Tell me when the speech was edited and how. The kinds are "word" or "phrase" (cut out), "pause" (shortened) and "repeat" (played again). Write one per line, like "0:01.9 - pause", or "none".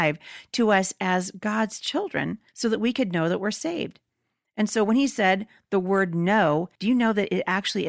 0:02.5 - pause
0:06.8 - pause